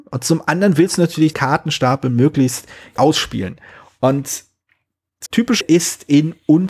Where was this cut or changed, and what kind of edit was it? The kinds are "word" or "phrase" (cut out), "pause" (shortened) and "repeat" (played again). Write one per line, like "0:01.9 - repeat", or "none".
0:01.3 - word
0:03.0 - word
0:05.3 - word
0:05.6 - word